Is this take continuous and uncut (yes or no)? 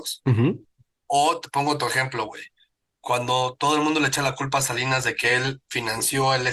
yes